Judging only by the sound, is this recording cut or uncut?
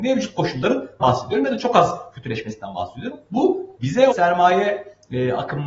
cut